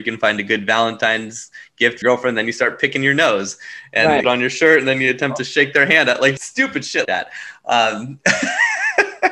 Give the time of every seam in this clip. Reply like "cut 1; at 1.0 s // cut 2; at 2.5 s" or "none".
cut 1; at 2.0 s // cut 2; at 4.2 s // cut 3; at 6.4 s // cut 4; at 7.0 s